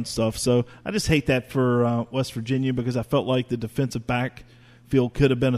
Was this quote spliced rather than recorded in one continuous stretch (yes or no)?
no